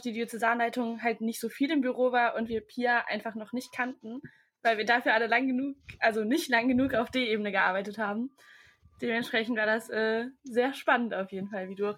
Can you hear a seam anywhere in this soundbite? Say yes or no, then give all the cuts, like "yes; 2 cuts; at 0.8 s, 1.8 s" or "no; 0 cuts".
no; 0 cuts